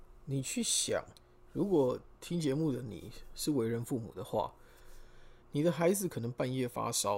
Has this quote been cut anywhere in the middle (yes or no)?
yes